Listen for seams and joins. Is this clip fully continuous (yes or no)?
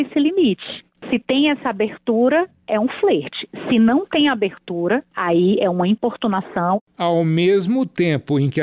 no